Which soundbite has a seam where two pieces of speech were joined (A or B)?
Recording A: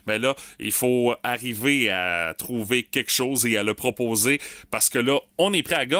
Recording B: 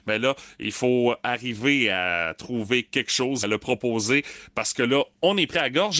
B